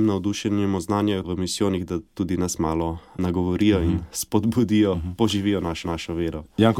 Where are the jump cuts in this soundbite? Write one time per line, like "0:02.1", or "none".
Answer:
0:01.2
0:05.8